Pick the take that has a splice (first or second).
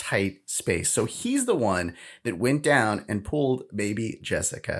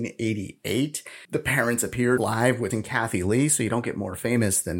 second